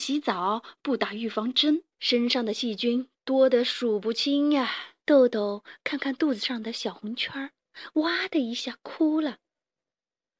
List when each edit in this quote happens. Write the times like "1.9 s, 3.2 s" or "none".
1.9 s, 5.0 s